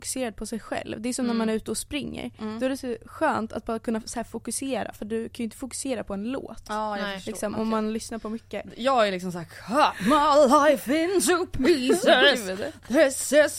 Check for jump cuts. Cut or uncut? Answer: uncut